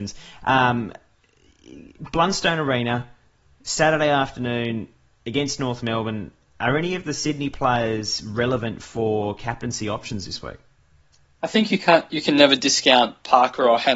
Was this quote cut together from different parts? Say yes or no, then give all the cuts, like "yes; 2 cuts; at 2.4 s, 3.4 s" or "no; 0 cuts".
no; 0 cuts